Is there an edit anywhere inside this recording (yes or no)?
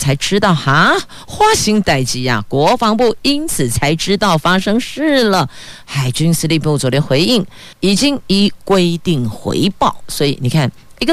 yes